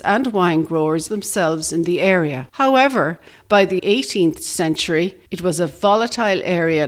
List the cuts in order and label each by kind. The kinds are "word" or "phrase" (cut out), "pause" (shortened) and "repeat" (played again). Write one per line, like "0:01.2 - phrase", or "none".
0:01.1 - word
0:02.5 - pause
0:03.8 - word
0:05.3 - pause